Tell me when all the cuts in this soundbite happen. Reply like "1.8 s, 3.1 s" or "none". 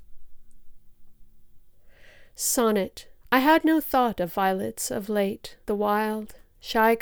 3.2 s, 5.6 s